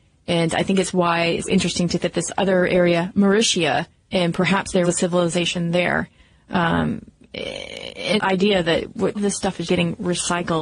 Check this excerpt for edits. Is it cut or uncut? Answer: cut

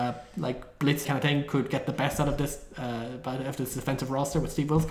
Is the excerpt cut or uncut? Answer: cut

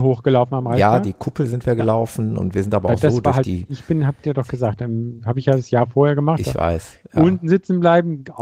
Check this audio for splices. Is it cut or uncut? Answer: uncut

